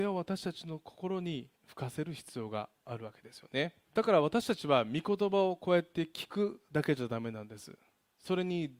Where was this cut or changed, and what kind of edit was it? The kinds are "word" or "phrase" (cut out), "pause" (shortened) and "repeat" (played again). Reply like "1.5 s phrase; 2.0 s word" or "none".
3.8 s pause